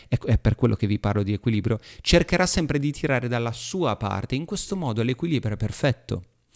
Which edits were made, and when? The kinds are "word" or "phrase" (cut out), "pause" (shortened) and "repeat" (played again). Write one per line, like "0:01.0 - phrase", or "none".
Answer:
none